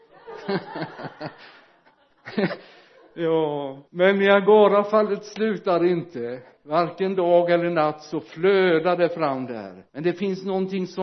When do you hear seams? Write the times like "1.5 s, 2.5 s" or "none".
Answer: 3.9 s, 6.6 s, 9.9 s